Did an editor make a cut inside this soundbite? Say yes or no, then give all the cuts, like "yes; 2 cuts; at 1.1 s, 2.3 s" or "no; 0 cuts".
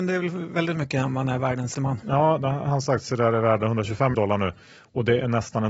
yes; 2 cuts; at 1.7 s, 4.1 s